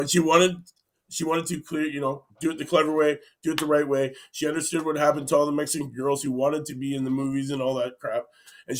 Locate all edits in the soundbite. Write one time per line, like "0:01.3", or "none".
0:02.3